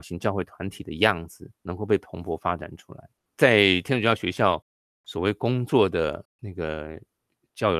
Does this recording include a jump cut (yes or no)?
yes